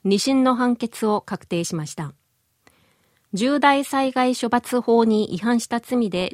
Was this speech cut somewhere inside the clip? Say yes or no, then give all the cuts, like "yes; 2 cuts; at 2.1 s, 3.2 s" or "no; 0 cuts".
no; 0 cuts